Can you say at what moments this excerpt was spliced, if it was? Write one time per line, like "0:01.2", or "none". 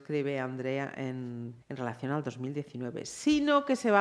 0:01.6